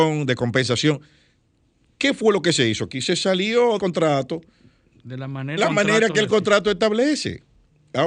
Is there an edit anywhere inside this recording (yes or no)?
yes